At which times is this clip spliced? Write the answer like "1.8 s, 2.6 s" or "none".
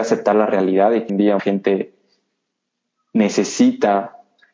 1.1 s, 1.4 s